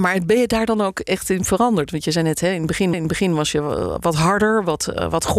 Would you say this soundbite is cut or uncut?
cut